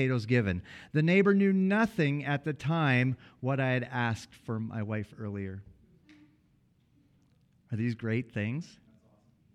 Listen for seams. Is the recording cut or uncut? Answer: uncut